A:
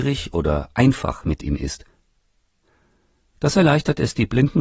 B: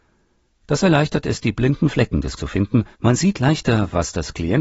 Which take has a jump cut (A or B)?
B